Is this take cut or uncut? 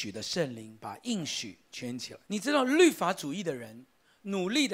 cut